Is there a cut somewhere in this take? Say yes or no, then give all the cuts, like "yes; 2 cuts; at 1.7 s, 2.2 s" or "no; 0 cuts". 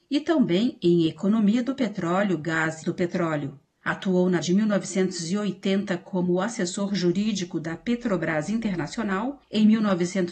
yes; 2 cuts; at 2.8 s, 4.4 s